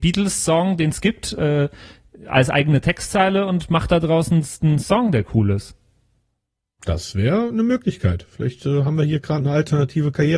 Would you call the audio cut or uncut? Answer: uncut